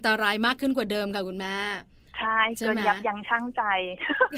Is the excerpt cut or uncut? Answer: uncut